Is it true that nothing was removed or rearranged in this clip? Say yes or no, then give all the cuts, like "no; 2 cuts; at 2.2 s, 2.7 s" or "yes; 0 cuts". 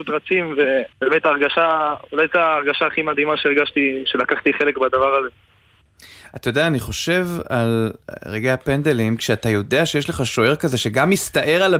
no; 1 cut; at 0.9 s